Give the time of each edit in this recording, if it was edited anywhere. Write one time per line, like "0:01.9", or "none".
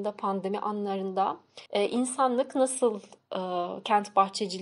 0:01.7